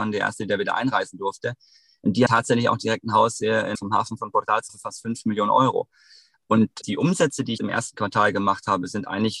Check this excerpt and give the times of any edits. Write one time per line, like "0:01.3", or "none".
0:02.3
0:03.8
0:04.7
0:06.8
0:07.6